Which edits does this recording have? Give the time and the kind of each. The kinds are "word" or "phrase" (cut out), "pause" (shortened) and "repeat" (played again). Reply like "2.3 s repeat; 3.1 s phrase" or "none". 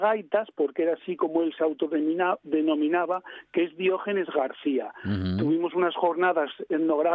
none